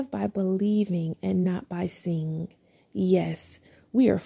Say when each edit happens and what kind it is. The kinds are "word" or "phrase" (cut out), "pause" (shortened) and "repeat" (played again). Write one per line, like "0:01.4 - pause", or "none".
none